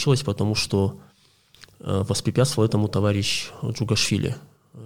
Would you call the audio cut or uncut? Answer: uncut